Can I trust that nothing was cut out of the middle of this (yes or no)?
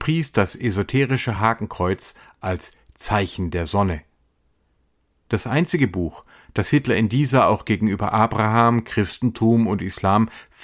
yes